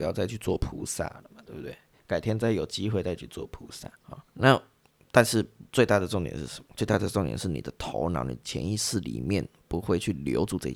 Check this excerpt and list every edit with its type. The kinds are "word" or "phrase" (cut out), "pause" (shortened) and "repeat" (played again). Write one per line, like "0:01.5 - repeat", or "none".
0:03.9 - pause
0:04.3 - pause
0:05.7 - pause
0:06.7 - pause